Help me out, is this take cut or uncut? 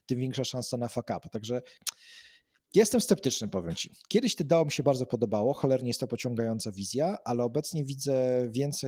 uncut